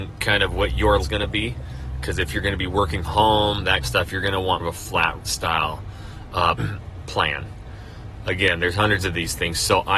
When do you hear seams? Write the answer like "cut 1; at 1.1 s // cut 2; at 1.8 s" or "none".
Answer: cut 1; at 1.0 s // cut 2; at 3.0 s // cut 3; at 3.8 s // cut 4; at 4.6 s // cut 5; at 5.2 s // cut 6; at 6.6 s